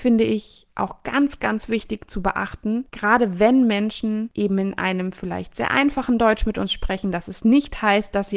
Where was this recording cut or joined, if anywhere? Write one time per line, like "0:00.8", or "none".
0:02.9

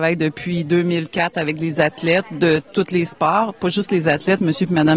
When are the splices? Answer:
none

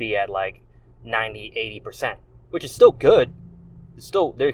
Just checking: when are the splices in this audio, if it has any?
0:02.4

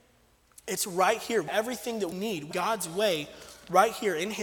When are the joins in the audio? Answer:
0:01.5
0:02.1
0:02.5

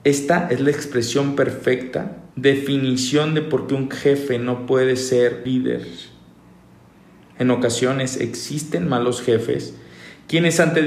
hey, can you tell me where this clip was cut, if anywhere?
0:02.3
0:05.5

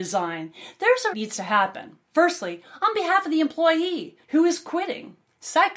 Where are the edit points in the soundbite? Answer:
0:01.1
0:02.0
0:04.2

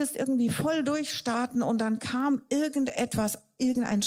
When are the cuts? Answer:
none

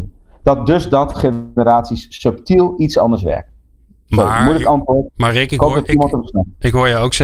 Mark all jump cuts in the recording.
none

